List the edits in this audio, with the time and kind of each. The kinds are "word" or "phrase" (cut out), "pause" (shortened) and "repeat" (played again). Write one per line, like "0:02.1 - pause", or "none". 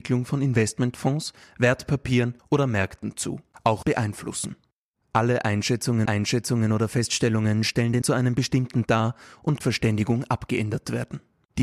0:02.4 - word
0:03.8 - phrase
0:06.1 - repeat
0:08.0 - word
0:08.9 - word
0:09.6 - phrase